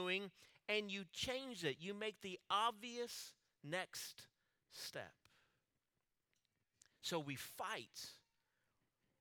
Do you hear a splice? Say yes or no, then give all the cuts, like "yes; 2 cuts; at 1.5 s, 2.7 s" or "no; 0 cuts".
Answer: no; 0 cuts